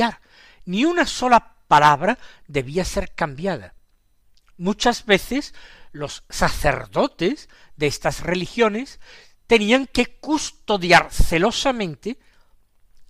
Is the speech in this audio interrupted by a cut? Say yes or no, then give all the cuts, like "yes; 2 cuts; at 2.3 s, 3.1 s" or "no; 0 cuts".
no; 0 cuts